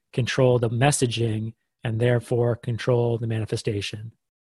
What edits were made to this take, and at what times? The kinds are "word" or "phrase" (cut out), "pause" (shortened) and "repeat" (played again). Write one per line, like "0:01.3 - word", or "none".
none